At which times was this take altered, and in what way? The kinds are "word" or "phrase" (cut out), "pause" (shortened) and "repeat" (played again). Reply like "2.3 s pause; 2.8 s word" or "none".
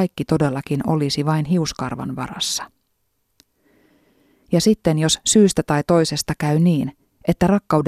none